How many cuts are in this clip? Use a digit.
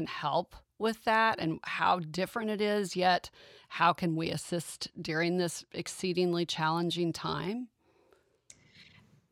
0